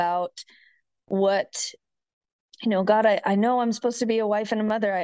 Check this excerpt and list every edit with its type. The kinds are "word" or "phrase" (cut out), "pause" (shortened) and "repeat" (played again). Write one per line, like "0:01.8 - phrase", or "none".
none

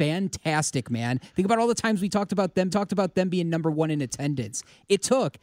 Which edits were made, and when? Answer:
0:02.7 - repeat

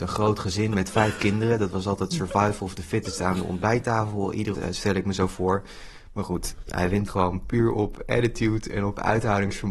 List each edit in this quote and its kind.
0:04.5 - word
0:07.1 - phrase

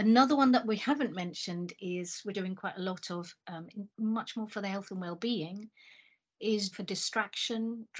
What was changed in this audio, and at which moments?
0:02.3 - word
0:03.9 - pause
0:06.7 - word

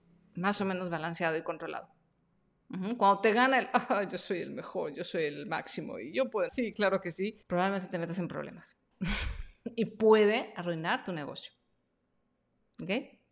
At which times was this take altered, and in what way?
0:06.5 - word
0:07.4 - pause

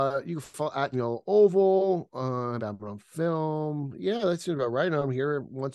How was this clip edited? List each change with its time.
0:00.9 - word
0:02.6 - word

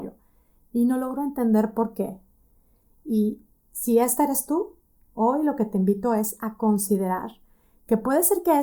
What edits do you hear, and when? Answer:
none

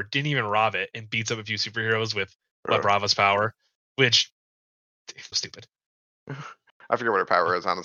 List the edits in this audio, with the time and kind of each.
0:05.3 - word

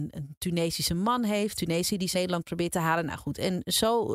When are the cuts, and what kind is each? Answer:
0:01.5 - word
0:02.1 - word

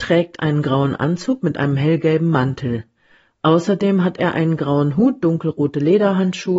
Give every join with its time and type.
none

